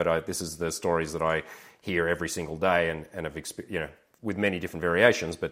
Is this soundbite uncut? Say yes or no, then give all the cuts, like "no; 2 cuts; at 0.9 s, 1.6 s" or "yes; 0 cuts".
yes; 0 cuts